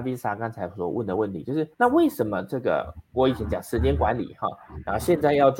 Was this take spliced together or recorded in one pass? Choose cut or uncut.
cut